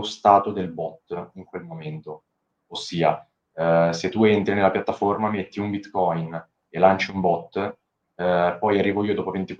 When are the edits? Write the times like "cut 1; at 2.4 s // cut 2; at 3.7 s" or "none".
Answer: none